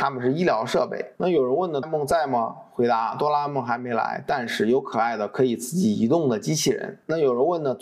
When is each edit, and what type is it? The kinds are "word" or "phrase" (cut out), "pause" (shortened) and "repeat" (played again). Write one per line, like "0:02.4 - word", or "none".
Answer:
0:01.1 - pause
0:01.8 - phrase

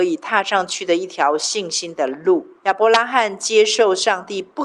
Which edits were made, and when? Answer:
0:02.6 - pause

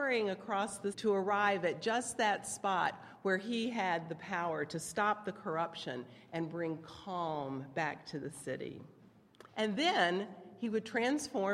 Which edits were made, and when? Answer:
0:00.9 - word
0:09.5 - pause

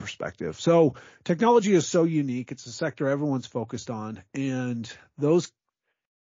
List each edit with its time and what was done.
none

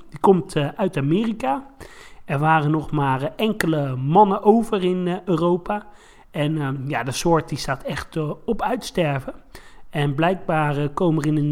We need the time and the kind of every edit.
none

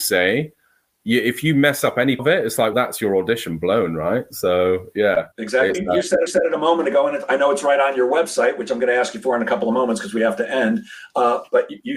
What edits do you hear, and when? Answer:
0:02.2 - word
0:02.7 - word
0:05.3 - pause
0:05.7 - word
0:06.3 - repeat

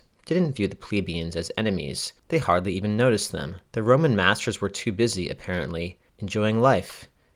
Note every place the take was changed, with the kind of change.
0:02.2 - pause
0:03.7 - pause
0:06.1 - pause

